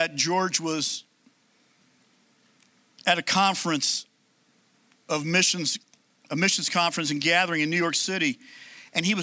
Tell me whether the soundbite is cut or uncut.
uncut